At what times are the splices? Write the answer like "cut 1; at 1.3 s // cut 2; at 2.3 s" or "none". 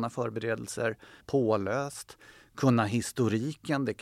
cut 1; at 1.2 s